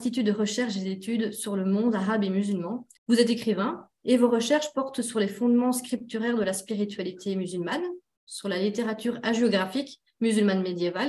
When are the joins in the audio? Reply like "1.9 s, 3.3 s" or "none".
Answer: 3.0 s